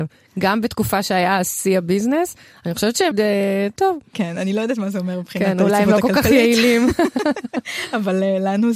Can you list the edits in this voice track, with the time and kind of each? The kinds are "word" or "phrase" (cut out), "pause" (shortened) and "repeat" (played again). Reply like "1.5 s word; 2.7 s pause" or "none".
3.1 s word; 3.8 s phrase